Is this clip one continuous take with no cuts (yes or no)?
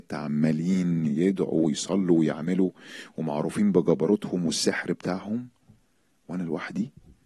yes